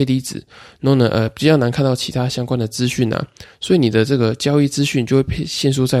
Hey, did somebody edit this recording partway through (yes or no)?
no